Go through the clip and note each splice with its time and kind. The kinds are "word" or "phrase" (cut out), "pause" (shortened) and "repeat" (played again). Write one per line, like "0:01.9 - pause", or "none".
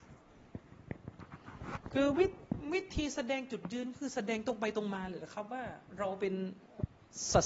0:05.9 - pause